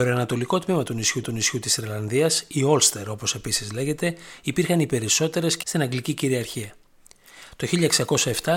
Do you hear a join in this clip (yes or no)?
yes